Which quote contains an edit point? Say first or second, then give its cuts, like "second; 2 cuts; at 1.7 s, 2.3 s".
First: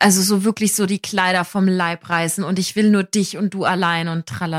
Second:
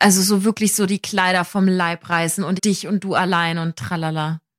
second; 1 cut; at 2.6 s